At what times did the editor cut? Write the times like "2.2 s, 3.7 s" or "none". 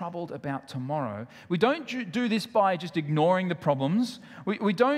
none